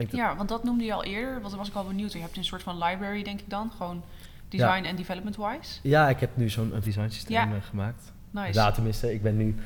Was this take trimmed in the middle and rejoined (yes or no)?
yes